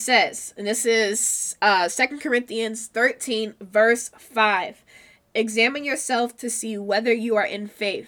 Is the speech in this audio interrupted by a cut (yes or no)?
no